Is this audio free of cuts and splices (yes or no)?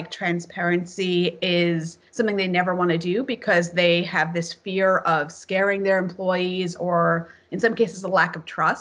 no